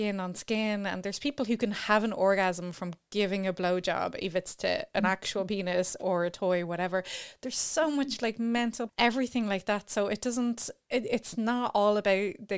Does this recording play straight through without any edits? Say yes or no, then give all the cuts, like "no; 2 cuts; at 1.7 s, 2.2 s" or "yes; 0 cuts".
no; 1 cut; at 8.9 s